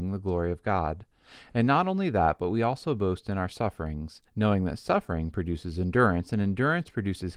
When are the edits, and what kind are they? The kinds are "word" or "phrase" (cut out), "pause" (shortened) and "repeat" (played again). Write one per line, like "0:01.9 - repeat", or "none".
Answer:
0:04.3 - pause